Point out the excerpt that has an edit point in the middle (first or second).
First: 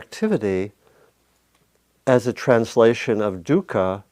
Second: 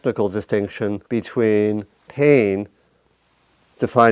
second